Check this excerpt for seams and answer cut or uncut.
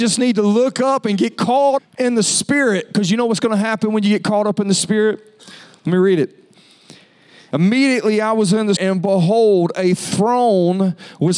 cut